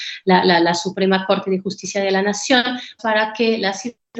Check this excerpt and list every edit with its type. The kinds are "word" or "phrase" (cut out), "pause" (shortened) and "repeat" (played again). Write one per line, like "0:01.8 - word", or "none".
0:03.0 - word